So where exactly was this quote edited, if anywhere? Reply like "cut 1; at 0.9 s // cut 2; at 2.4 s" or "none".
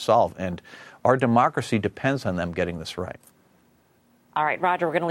none